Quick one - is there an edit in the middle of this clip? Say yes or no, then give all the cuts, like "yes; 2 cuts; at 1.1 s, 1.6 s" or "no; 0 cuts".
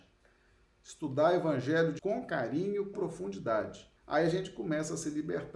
yes; 3 cuts; at 2.0 s, 2.9 s, 4.0 s